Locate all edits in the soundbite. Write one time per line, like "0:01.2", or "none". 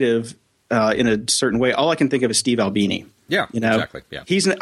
none